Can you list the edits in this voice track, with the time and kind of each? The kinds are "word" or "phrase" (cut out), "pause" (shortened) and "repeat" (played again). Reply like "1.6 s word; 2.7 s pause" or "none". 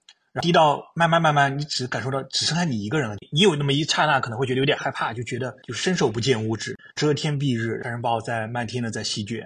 5.6 s pause; 6.9 s pause